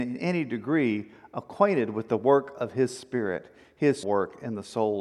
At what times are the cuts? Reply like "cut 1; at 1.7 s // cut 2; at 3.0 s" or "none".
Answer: cut 1; at 4.0 s